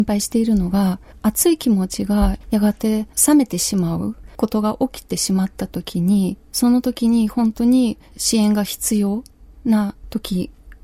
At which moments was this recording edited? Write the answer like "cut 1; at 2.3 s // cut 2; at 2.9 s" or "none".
none